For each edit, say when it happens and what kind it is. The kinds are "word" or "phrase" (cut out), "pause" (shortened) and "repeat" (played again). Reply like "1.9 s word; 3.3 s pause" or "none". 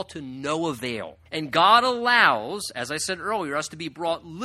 1.3 s pause

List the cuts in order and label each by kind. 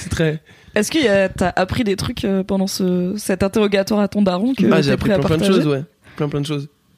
none

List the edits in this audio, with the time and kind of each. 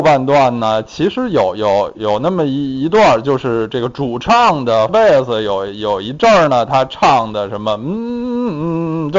4.9 s word

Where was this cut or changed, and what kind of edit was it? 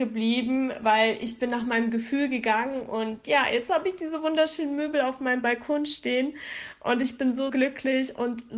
7.5 s word

